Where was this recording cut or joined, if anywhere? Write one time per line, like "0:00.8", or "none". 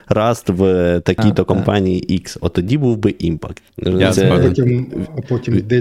0:03.7